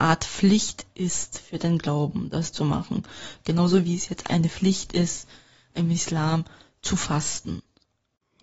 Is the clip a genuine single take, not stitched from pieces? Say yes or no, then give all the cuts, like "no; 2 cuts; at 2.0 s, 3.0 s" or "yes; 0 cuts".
no; 1 cut; at 4.3 s